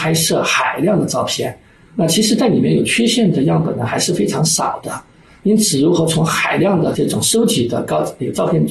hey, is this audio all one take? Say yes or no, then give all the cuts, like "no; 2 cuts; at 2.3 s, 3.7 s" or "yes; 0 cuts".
yes; 0 cuts